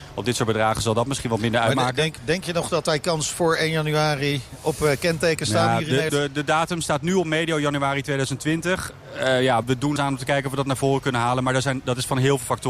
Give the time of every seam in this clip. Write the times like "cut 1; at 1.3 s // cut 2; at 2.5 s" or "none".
cut 1; at 2.8 s // cut 2; at 6.1 s // cut 3; at 9.6 s // cut 4; at 10.0 s